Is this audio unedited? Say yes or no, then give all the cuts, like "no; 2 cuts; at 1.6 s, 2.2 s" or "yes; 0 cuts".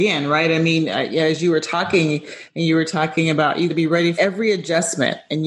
no; 2 cuts; at 3.7 s, 4.2 s